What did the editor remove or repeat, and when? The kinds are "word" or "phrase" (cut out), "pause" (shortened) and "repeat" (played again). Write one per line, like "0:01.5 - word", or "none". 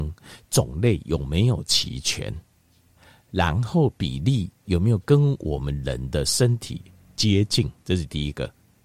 0:07.8 - pause